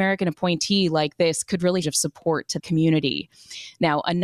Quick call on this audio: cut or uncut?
cut